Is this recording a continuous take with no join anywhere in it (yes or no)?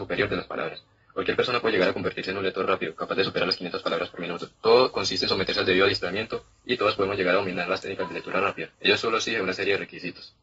no